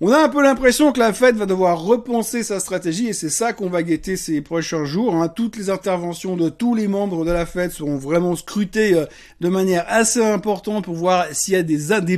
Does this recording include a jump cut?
no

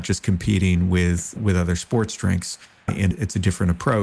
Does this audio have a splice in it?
no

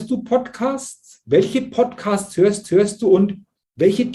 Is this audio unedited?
no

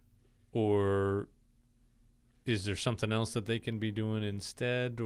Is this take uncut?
yes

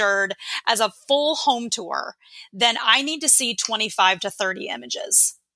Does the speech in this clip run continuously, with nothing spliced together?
yes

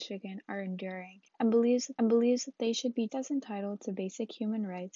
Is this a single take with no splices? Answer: no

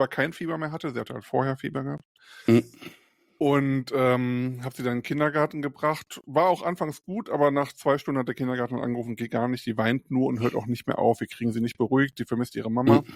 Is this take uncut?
yes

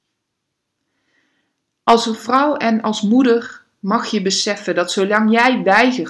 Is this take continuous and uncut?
yes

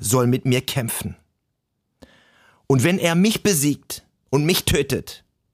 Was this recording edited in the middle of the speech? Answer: no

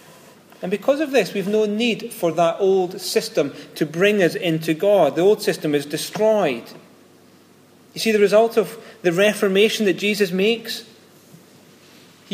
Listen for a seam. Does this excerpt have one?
no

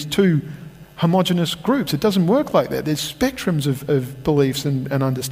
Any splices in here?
no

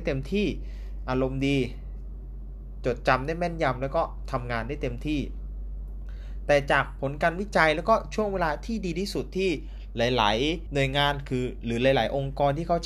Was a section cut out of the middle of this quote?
yes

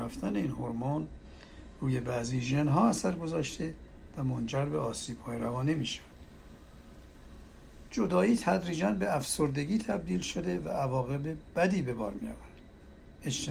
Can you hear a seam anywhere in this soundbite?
no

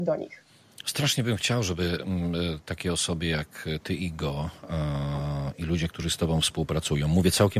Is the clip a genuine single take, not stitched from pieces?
yes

